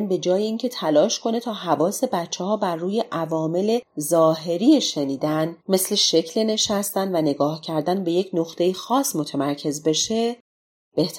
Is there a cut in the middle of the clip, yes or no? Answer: yes